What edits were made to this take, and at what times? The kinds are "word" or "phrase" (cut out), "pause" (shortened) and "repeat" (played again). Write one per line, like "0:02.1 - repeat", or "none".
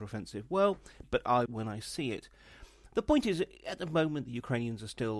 0:01.0 - word
0:01.5 - phrase